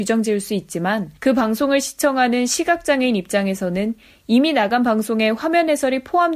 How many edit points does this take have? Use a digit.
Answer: 1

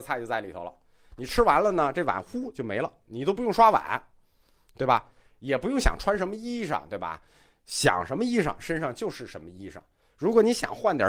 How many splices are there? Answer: 0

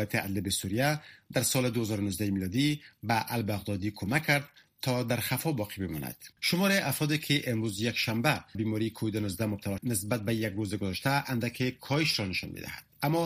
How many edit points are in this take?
3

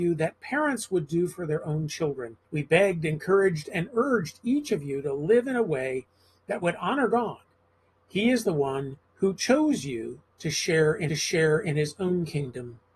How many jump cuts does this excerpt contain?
3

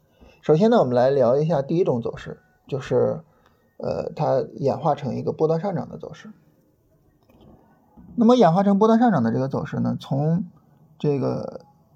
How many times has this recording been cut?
0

